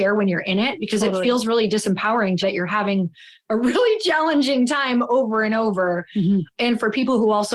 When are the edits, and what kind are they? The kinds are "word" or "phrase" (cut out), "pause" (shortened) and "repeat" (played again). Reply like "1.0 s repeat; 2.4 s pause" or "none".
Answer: 2.4 s word